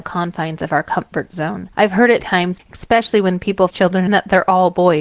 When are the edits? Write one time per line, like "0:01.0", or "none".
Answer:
0:01.7
0:02.2
0:02.6
0:03.7
0:04.1